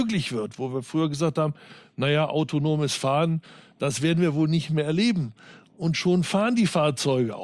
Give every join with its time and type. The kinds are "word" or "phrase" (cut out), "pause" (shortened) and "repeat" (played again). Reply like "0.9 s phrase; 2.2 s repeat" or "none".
none